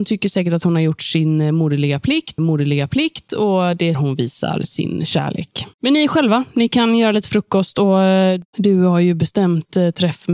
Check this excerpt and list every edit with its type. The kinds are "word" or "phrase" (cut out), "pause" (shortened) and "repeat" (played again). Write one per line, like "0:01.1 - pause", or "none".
0:02.4 - repeat
0:03.9 - phrase
0:05.7 - pause
0:08.5 - pause